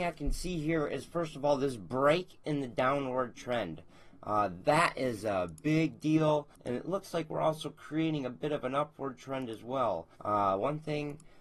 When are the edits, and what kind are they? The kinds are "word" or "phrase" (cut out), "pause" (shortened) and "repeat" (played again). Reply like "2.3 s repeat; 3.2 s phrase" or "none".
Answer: 6.5 s pause; 10.1 s pause